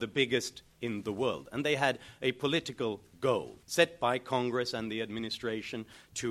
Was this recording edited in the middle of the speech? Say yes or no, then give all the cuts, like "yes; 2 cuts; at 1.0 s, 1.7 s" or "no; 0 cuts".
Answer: yes; 1 cut; at 3.6 s